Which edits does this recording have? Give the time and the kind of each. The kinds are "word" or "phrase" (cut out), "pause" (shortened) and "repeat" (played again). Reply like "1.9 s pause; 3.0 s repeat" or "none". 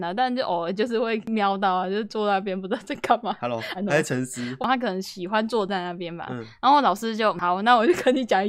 3.7 s phrase